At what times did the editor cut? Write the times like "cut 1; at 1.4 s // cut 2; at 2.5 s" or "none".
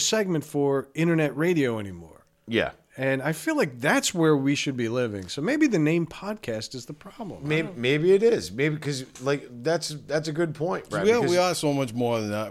none